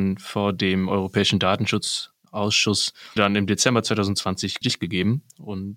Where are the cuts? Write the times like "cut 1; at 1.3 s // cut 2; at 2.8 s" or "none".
cut 1; at 3.2 s // cut 2; at 4.6 s